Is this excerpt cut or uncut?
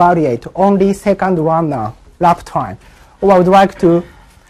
uncut